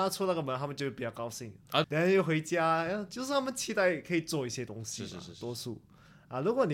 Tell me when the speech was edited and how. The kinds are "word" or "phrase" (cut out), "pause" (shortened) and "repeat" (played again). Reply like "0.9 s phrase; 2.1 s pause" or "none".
1.8 s phrase